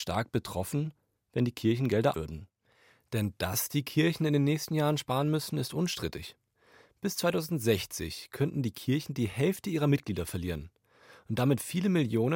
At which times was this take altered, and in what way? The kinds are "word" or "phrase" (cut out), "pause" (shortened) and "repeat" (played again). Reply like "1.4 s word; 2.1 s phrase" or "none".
2.1 s word